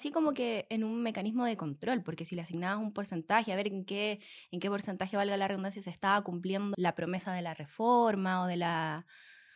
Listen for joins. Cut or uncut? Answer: cut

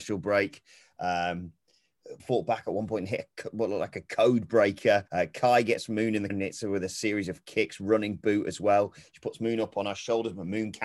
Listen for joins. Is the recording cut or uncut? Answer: cut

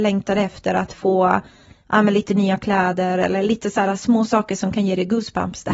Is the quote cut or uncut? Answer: uncut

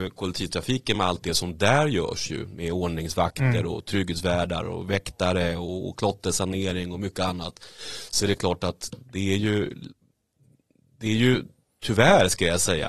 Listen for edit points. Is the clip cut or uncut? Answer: uncut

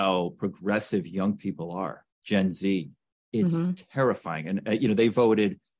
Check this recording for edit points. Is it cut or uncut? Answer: cut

